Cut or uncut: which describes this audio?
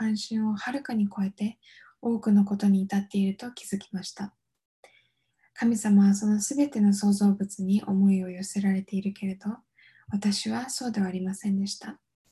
uncut